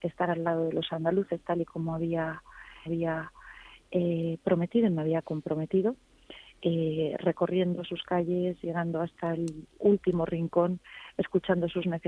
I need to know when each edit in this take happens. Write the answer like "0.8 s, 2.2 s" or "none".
2.9 s